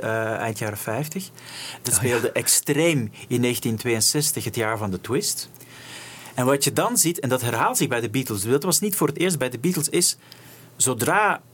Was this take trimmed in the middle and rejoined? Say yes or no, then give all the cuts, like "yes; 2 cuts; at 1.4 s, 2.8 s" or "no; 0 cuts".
no; 0 cuts